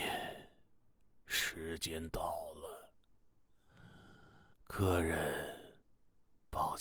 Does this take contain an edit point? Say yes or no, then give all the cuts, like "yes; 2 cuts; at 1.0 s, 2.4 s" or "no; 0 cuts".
yes; 1 cut; at 4.5 s